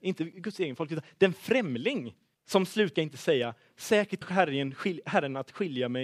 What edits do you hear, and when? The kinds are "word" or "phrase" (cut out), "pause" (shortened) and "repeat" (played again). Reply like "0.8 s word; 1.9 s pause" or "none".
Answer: 2.3 s pause; 2.9 s phrase; 4.2 s word